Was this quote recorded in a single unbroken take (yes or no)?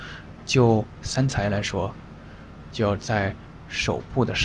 no